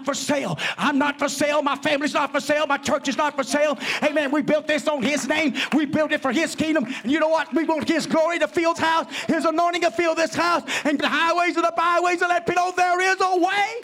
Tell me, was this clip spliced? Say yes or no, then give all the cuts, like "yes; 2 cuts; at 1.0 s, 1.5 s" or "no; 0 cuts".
yes; 3 cuts; at 8.7 s, 11.0 s, 12.5 s